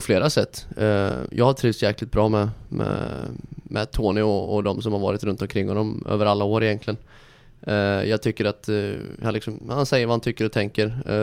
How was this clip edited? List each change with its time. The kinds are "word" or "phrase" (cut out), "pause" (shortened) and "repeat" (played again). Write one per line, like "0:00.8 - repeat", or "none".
none